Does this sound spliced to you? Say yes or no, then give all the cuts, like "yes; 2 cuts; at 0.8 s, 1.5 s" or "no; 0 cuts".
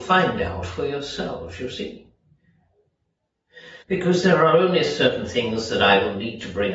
yes; 1 cut; at 3.8 s